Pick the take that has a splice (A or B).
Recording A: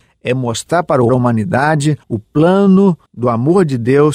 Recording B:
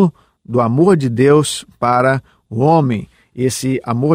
A